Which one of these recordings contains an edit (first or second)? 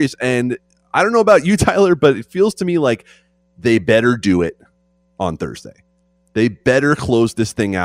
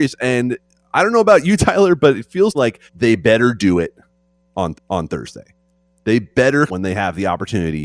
second